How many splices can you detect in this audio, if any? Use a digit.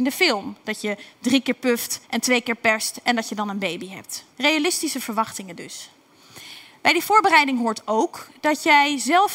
2